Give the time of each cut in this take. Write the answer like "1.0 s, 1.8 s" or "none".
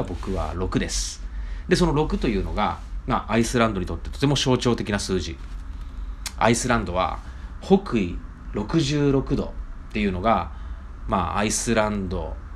none